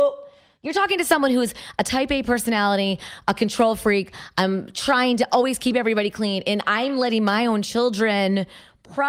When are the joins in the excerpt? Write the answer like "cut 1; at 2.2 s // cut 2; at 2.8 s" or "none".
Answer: none